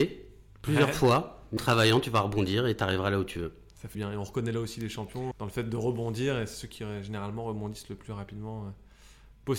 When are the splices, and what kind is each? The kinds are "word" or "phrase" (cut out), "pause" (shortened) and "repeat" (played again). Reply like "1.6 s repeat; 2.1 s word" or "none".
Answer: 1.6 s word; 3.9 s word; 5.3 s word